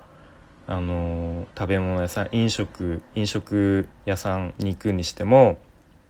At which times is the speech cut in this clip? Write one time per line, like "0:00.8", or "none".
0:01.5
0:03.9